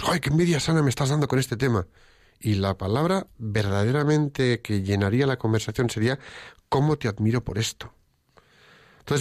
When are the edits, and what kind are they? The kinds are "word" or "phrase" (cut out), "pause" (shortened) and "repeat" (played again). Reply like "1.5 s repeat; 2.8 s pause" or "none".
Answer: none